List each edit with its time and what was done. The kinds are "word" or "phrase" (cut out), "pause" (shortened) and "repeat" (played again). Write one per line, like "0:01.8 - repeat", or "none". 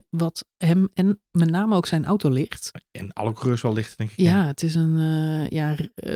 none